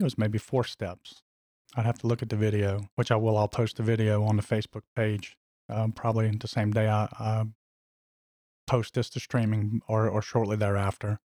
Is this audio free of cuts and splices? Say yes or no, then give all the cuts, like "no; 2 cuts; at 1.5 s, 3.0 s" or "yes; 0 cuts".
yes; 0 cuts